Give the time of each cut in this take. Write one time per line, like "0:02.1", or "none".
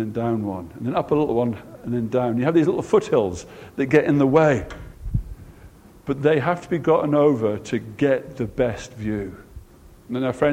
none